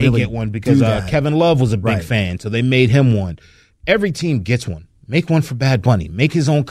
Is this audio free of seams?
yes; 0 cuts

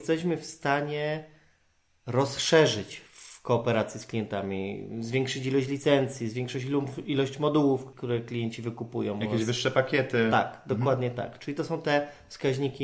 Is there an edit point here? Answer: no; 0 cuts

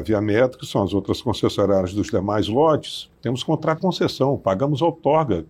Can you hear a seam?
yes; 2 cuts; at 3.1 s, 3.8 s

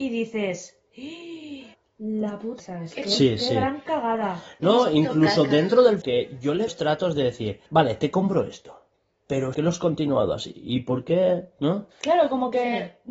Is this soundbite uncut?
no; 7 cuts; at 1.7 s, 2.6 s, 6.0 s, 6.7 s, 7.7 s, 9.5 s, 11.9 s

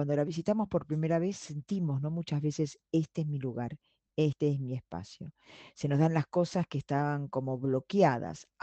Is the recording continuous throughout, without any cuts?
yes; 0 cuts

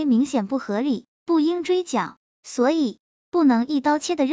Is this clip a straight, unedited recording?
yes; 0 cuts

